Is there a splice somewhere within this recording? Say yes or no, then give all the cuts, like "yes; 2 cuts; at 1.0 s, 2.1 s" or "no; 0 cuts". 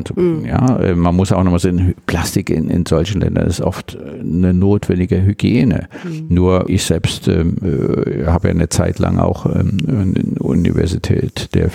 no; 0 cuts